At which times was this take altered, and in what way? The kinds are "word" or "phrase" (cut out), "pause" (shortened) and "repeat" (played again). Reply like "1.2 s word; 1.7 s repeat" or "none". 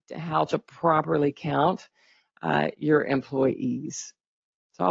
none